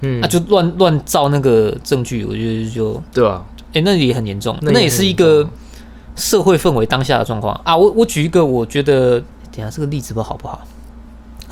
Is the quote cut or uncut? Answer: cut